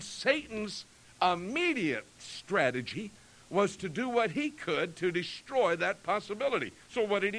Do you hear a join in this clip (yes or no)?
no